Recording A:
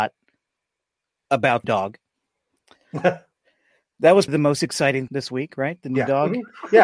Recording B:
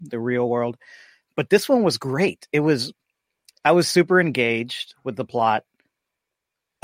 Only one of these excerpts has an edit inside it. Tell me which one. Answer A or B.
A